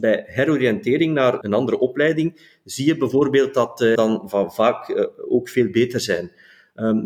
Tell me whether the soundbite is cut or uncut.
cut